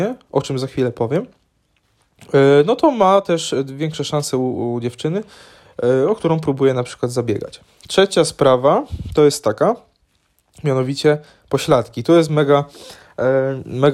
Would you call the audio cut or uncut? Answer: uncut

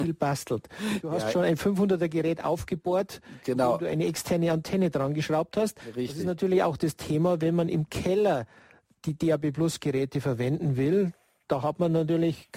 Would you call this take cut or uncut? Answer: uncut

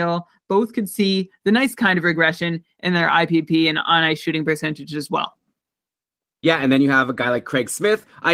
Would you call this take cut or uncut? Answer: uncut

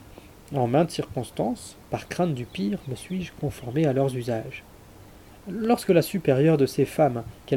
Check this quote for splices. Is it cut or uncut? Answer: uncut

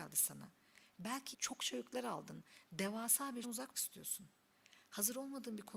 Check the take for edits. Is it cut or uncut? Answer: cut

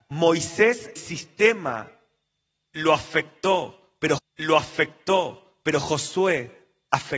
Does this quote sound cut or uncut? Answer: cut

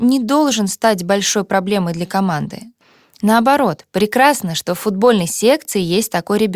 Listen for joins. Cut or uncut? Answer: uncut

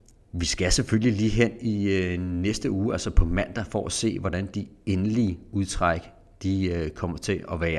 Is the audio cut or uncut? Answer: uncut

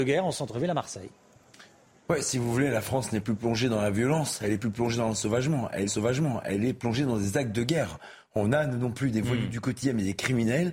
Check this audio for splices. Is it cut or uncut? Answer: cut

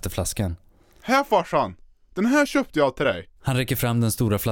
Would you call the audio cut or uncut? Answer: cut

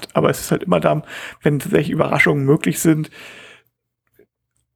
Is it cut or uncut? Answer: uncut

